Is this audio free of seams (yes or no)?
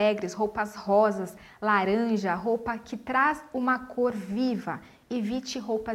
yes